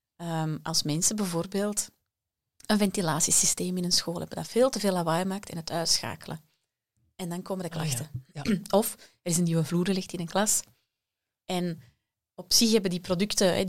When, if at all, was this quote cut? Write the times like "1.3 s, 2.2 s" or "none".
none